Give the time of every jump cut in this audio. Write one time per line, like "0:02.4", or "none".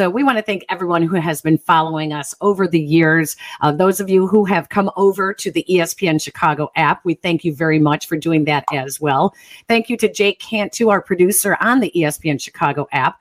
none